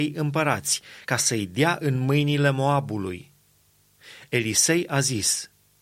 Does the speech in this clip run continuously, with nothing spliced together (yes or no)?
yes